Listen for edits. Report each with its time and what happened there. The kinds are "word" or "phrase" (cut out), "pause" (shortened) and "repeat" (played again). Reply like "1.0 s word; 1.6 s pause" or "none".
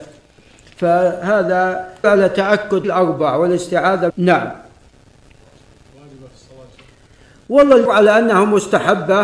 2.0 s word; 2.8 s word; 4.1 s word; 7.9 s word